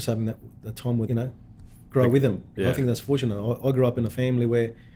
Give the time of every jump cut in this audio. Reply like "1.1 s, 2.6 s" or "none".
1.1 s, 2.6 s